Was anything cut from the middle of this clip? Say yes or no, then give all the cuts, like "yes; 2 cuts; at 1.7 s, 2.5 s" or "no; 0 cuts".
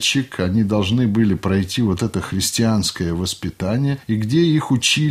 no; 0 cuts